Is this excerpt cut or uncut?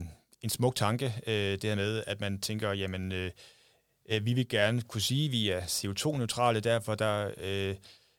uncut